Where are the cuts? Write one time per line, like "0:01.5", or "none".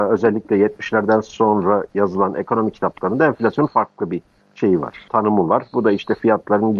0:05.1